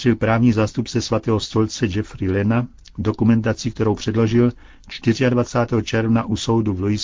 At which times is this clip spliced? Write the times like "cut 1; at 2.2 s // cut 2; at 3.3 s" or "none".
none